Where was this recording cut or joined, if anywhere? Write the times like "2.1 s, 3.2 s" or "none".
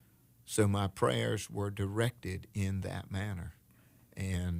none